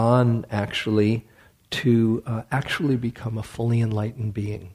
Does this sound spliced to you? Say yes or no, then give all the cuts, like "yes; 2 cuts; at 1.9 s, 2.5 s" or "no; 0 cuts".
no; 0 cuts